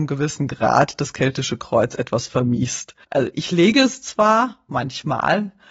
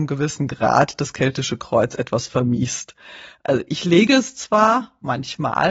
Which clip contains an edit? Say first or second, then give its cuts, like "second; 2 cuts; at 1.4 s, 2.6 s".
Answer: first; 1 cut; at 3.0 s